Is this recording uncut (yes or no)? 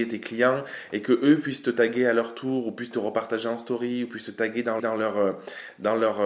no